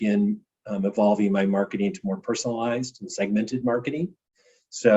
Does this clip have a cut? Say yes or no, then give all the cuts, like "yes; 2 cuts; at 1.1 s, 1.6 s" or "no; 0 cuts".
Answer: no; 0 cuts